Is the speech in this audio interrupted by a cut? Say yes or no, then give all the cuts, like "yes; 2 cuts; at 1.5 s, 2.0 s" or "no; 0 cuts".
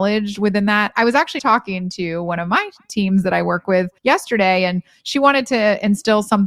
yes; 2 cuts; at 1.4 s, 4.0 s